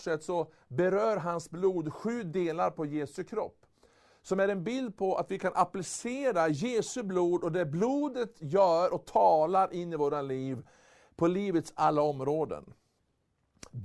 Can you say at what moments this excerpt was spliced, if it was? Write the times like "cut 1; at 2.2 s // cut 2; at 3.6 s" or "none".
none